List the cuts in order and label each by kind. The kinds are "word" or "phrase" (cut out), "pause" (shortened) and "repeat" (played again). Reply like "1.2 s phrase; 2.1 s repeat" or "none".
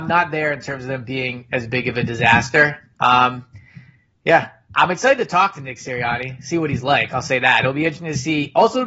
none